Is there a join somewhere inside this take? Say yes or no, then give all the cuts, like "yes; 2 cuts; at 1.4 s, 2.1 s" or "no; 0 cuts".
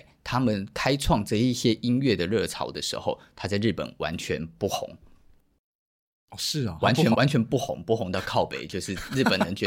yes; 1 cut; at 7.1 s